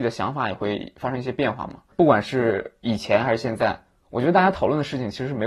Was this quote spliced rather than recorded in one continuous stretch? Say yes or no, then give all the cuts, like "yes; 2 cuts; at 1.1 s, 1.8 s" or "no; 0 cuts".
no; 0 cuts